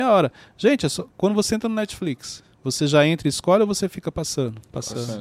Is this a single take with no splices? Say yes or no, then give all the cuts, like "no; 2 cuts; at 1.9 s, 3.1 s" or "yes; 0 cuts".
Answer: no; 1 cut; at 2.5 s